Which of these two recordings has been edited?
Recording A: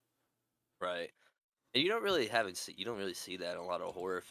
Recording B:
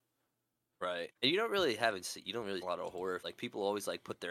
B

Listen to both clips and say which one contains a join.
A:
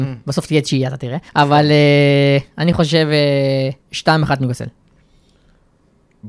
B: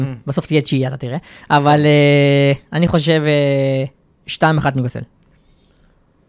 A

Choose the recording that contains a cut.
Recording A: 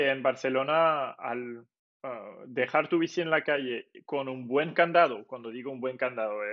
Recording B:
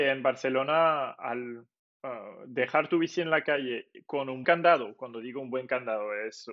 B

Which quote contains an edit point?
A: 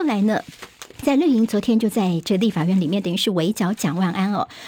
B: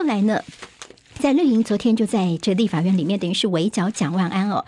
A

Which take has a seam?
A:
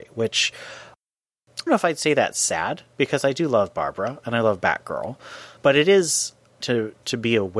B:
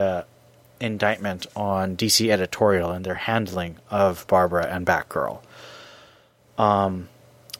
A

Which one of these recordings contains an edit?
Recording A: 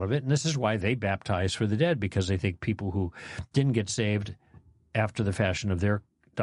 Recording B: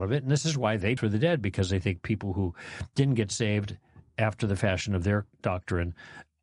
B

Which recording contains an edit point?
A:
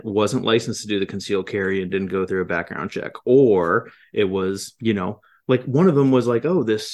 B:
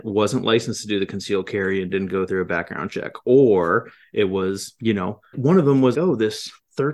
B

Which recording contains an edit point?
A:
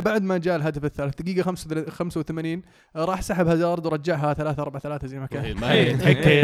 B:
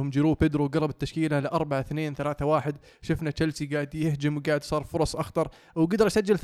A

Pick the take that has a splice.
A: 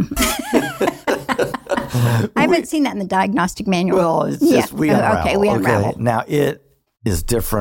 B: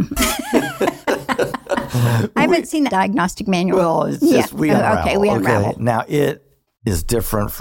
B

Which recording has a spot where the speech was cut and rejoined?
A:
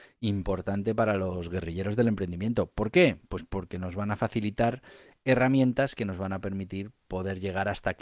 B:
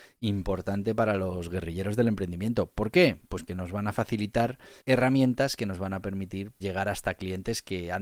B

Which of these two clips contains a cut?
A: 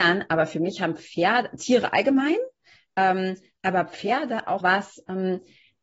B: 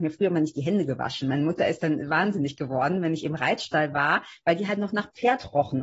A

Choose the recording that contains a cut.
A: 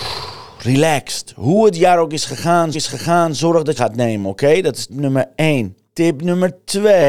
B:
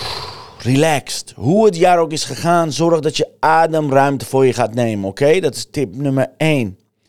A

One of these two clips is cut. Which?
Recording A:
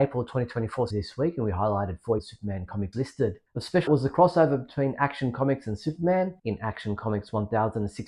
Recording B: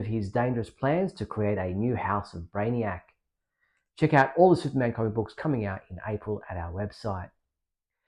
A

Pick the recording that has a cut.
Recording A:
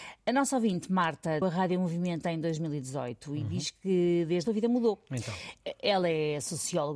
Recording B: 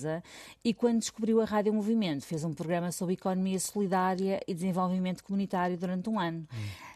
A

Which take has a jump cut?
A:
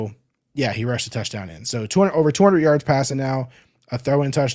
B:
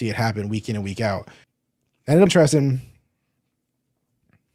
B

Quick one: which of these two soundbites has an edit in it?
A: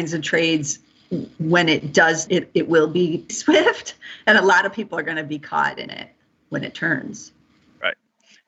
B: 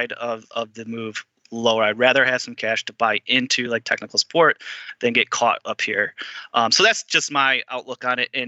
A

